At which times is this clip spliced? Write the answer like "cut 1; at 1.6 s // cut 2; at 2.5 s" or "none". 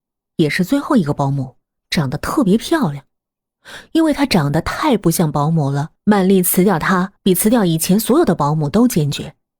cut 1; at 1.6 s // cut 2; at 6.0 s // cut 3; at 7.2 s